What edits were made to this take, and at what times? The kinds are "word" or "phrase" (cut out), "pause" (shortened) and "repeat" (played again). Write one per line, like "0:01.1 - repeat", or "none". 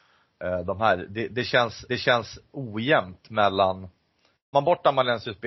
0:01.9 - repeat
0:04.5 - word